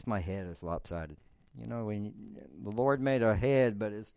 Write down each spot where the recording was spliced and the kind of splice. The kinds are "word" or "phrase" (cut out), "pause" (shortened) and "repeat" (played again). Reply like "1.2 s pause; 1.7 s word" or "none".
none